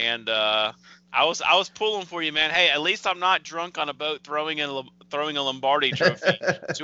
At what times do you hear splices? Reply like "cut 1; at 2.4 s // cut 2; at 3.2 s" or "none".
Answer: none